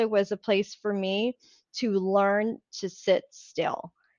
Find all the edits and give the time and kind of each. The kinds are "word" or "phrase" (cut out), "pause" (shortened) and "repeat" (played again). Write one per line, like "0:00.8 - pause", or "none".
none